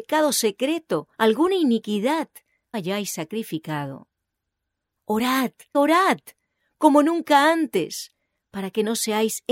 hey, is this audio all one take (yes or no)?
no